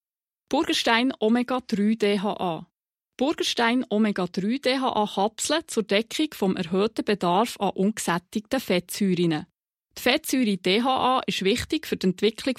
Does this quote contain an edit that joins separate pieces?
no; 0 cuts

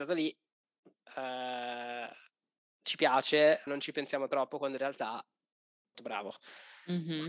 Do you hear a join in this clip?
yes; 2 cuts; at 3.7 s, 5.9 s

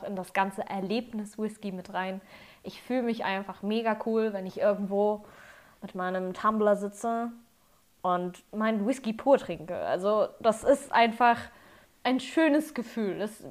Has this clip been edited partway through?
no; 0 cuts

